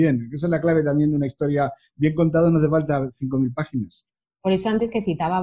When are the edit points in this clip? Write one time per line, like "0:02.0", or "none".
none